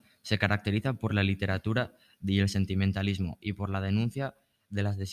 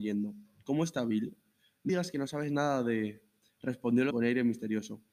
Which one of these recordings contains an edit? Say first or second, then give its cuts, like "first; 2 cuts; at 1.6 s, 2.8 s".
second; 2 cuts; at 1.9 s, 4.1 s